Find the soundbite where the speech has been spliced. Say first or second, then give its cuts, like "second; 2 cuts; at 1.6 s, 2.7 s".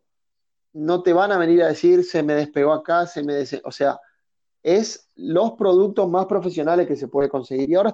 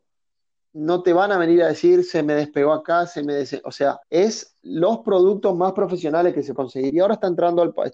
second; 2 cuts; at 4.0 s, 6.6 s